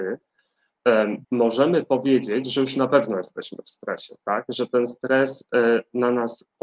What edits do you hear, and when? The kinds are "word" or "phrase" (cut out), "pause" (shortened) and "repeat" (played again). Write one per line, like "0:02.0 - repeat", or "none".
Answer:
0:01.2 - pause